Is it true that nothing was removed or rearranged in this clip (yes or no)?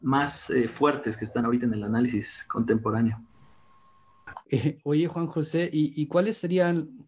yes